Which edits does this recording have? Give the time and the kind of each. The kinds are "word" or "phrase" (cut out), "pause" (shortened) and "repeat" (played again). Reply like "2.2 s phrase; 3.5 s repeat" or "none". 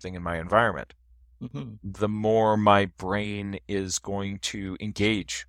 none

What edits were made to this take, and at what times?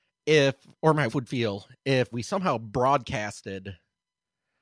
1.1 s word; 2.1 s word

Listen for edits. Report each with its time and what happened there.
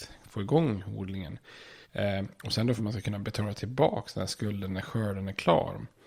1.8 s pause; 2.8 s phrase

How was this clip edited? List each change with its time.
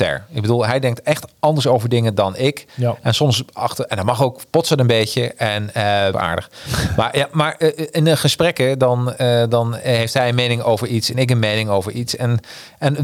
6.1 s phrase

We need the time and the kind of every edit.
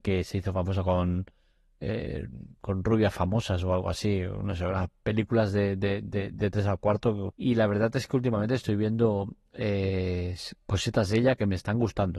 7.3 s phrase

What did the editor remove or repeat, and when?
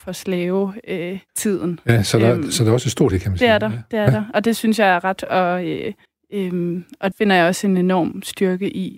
1.3 s pause; 3.1 s phrase; 5.2 s word; 6.1 s pause; 7.1 s word

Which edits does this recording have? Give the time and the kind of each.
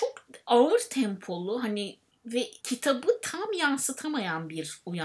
2.6 s pause

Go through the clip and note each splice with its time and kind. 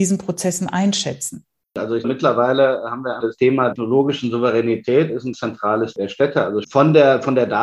2.0 s word; 3.2 s word; 3.7 s word; 5.3 s word; 6.6 s word

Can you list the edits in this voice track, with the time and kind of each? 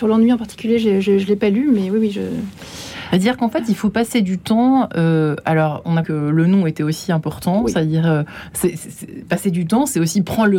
6.0 s word

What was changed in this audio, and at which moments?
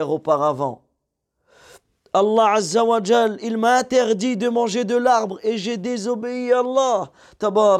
none

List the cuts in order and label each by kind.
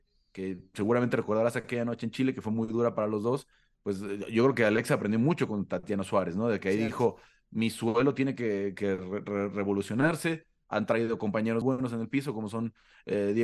11.6 s word

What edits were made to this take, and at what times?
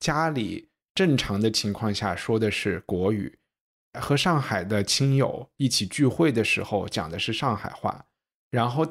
none

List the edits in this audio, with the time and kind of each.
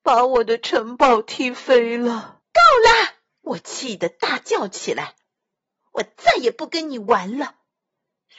2.4 s pause; 3.3 s pause

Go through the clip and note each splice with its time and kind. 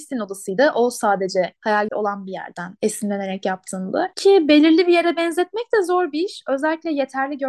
1.9 s phrase

